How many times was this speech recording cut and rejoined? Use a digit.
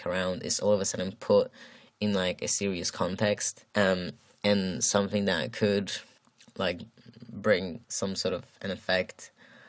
3